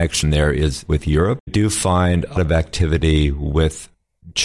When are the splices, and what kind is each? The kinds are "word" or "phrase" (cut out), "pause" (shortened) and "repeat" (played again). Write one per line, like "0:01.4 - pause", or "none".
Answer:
0:01.5 - word
0:02.4 - word